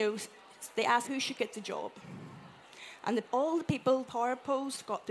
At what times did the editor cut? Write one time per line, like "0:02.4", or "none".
0:01.0
0:03.2
0:04.1